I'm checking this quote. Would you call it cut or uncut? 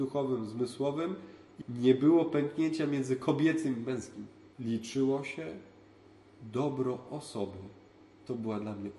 cut